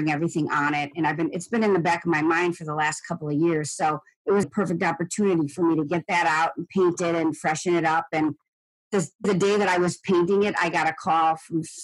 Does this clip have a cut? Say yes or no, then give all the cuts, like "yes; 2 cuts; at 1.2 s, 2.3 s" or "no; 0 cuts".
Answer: yes; 3 cuts; at 4.4 s, 8.8 s, 9.2 s